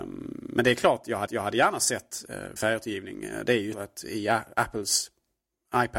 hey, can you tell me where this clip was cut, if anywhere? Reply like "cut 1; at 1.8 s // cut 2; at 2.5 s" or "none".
cut 1; at 1.3 s // cut 2; at 2.6 s // cut 3; at 3.7 s